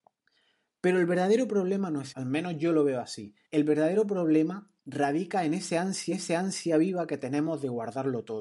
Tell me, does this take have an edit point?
yes; 4 cuts; at 2.1 s, 3.4 s, 4.8 s, 6.1 s

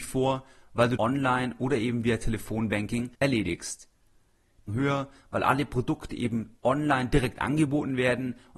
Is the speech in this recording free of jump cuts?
no; 3 cuts; at 1.0 s, 3.1 s, 4.7 s

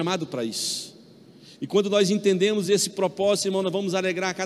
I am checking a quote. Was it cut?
no; 0 cuts

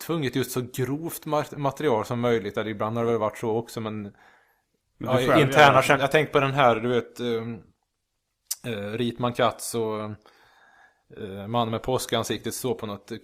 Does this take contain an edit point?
no; 0 cuts

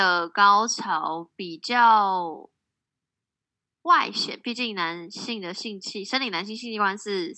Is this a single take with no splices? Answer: yes; 0 cuts

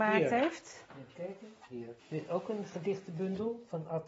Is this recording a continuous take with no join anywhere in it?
no; 1 cut; at 2.0 s

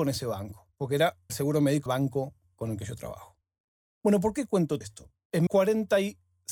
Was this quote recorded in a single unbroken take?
no; 4 cuts; at 1.3 s, 1.9 s, 4.8 s, 5.5 s

